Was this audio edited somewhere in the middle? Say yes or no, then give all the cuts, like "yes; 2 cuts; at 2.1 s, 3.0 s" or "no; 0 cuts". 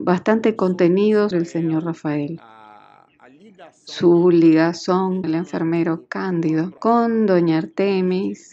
yes; 3 cuts; at 1.3 s, 5.2 s, 6.8 s